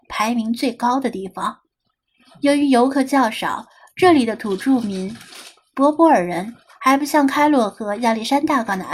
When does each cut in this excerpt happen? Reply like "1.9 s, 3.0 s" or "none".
none